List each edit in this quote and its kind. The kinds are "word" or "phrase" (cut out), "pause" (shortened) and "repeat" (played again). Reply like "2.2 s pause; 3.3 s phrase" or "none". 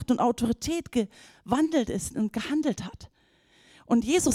none

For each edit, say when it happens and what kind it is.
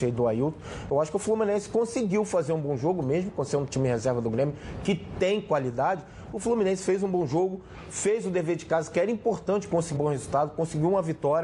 10.0 s word

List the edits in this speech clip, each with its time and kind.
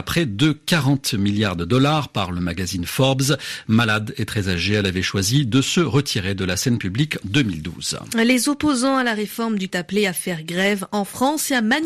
7.2 s word; 9.7 s phrase

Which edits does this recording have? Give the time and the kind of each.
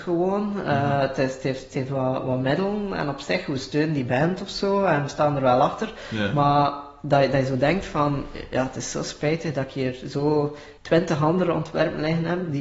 10.8 s pause

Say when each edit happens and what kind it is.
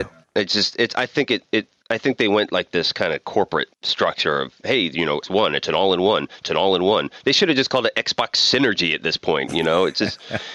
3.7 s pause; 5.2 s word; 6.4 s repeat

